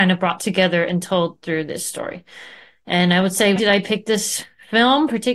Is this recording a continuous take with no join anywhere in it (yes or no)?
no